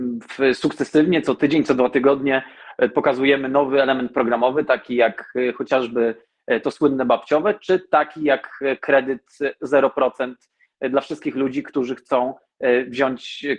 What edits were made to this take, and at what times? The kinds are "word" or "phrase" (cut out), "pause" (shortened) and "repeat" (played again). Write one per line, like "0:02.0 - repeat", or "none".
none